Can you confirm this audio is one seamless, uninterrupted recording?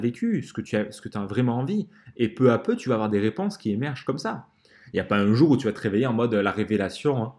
yes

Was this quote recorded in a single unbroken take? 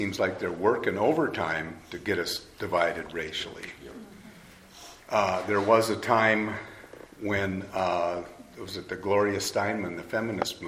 yes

